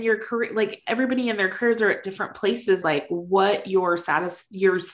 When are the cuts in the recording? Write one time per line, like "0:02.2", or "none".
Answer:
0:02.8